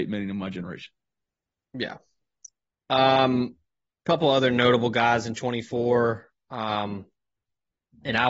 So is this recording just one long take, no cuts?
yes; 0 cuts

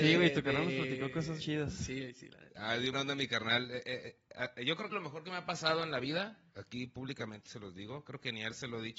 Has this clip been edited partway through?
yes; 4 cuts; at 1.4 s, 2.9 s, 4.9 s, 6.5 s

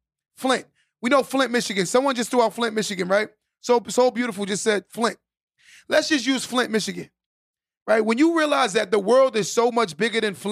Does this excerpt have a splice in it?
no; 0 cuts

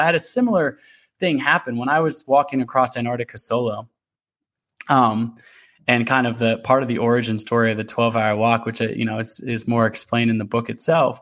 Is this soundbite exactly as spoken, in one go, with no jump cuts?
yes; 0 cuts

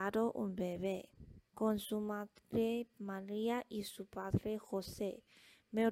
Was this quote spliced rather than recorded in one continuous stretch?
yes; 1 cut; at 1.5 s

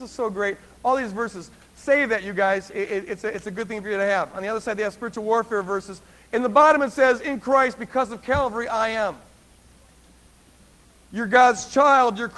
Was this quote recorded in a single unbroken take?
yes; 0 cuts

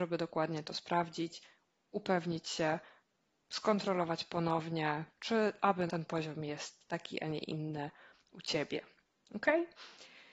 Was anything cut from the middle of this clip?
yes; 1 cut; at 5.9 s

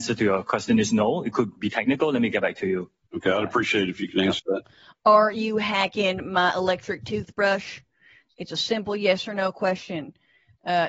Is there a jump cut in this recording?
no; 0 cuts

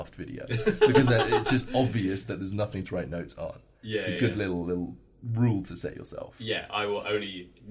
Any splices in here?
no; 0 cuts

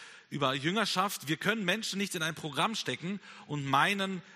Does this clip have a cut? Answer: no; 0 cuts

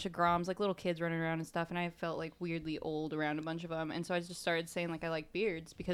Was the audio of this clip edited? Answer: no; 0 cuts

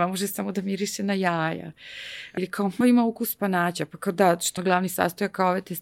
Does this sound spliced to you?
yes; 3 cuts; at 2.4 s, 2.8 s, 4.6 s

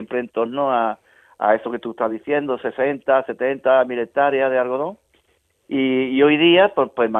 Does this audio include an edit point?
no; 0 cuts

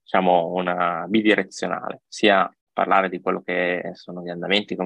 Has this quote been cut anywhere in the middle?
yes; 1 cut; at 2.6 s

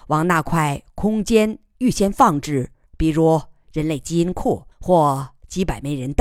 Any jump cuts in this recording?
yes; 2 cuts; at 2.9 s, 4.7 s

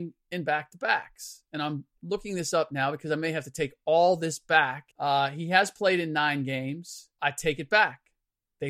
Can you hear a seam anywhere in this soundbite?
yes; 2 cuts; at 4.9 s, 7.2 s

